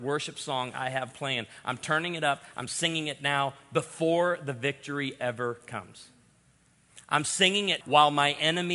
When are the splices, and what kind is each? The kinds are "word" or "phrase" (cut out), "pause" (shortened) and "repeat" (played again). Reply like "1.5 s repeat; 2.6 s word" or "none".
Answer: 7.8 s word

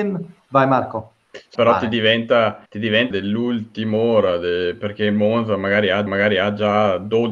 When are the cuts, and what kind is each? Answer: 1.5 s word; 2.6 s pause; 3.1 s word; 6.1 s repeat

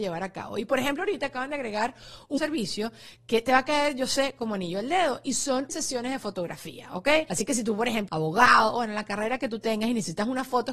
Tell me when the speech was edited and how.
2.4 s word; 5.7 s word; 8.1 s phrase

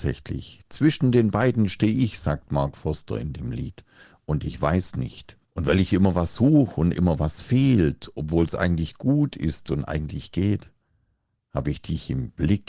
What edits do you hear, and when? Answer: 5.4 s pause

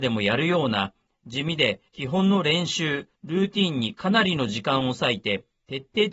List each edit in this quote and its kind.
1.9 s pause; 3.1 s pause

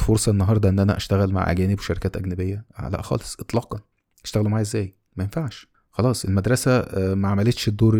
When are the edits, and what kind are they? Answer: none

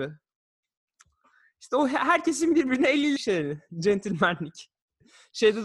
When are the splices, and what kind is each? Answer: 3.2 s phrase

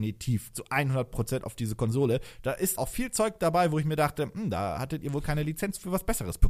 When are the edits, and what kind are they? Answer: 2.8 s word

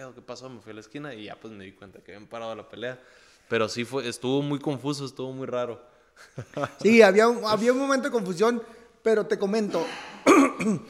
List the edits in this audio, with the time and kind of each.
none

